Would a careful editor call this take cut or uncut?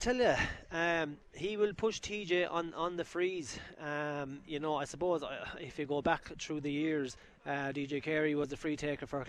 uncut